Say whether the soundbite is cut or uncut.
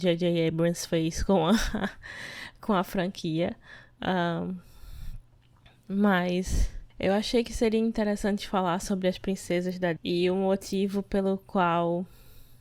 cut